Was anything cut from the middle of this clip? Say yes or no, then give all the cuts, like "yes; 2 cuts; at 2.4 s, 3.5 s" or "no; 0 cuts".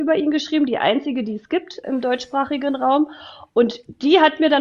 no; 0 cuts